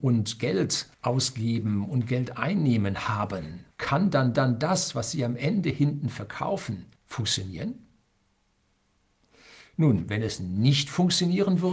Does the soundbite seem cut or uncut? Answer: cut